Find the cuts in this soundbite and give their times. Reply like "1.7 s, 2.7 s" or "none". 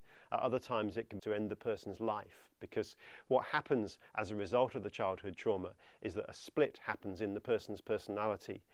1.2 s